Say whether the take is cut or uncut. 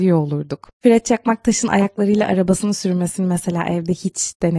uncut